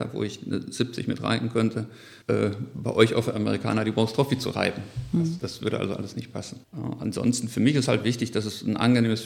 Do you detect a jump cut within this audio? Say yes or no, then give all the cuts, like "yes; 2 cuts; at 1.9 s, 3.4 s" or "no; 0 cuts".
yes; 2 cuts; at 2.2 s, 6.6 s